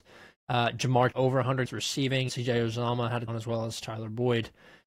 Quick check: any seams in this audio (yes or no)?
yes